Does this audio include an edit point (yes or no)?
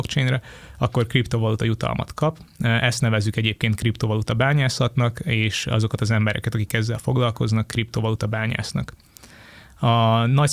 no